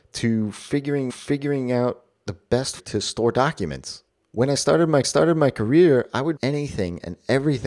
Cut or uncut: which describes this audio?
cut